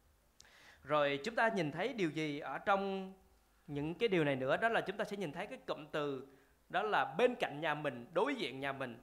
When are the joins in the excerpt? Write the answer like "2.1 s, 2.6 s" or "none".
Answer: none